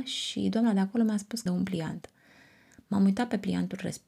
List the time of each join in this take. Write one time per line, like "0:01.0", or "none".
0:01.5